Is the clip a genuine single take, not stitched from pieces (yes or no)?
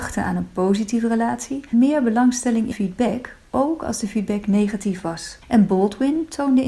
no